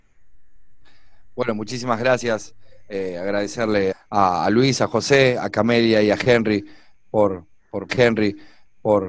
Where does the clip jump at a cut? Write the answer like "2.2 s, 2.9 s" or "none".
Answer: 3.9 s, 7.9 s